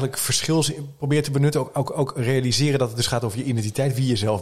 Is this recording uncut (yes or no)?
yes